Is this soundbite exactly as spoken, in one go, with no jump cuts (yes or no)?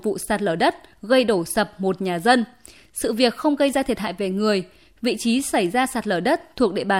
yes